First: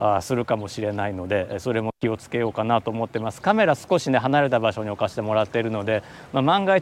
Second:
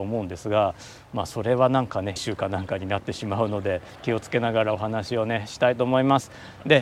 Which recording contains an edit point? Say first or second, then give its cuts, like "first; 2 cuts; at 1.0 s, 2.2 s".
second; 2 cuts; at 2.2 s, 4.0 s